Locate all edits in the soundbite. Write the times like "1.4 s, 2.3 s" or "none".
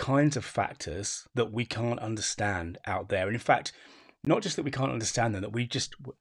1.3 s